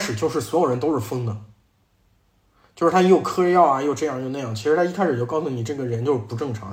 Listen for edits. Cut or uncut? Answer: uncut